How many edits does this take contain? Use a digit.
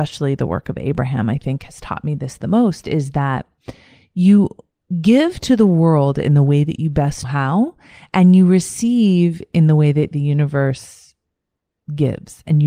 1